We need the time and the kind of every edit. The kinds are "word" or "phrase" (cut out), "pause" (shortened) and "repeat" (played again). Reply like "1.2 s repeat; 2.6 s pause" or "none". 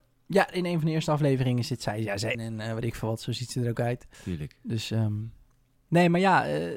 2.3 s phrase; 4.1 s pause